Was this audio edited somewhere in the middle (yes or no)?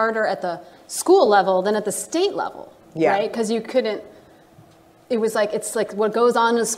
no